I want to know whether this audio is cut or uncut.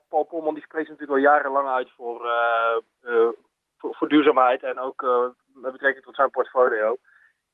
uncut